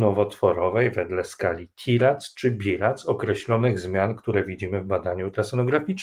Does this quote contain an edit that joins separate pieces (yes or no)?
no